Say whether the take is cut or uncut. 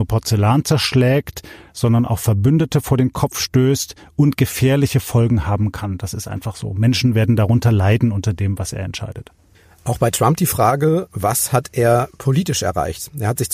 uncut